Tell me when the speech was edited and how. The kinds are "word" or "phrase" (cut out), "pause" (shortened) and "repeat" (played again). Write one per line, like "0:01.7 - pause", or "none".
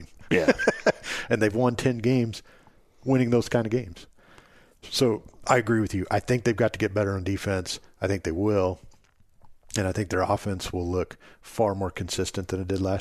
none